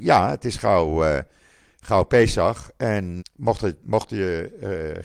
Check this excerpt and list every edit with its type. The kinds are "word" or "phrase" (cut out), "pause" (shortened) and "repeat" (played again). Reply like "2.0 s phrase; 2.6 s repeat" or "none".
3.2 s word